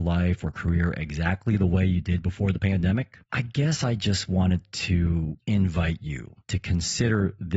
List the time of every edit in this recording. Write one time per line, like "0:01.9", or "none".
0:03.2
0:05.4
0:06.4